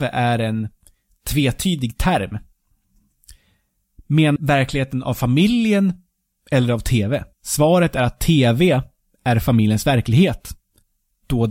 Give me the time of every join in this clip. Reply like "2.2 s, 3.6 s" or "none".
4.4 s, 7.3 s